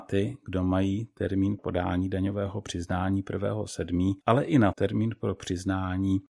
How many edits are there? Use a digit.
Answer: 3